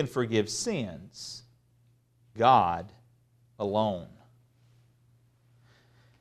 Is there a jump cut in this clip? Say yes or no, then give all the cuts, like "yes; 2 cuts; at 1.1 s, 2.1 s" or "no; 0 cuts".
yes; 1 cut; at 2.4 s